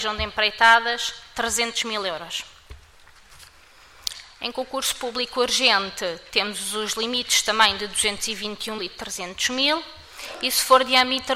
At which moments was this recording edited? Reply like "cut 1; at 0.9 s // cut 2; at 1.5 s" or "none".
cut 1; at 8.8 s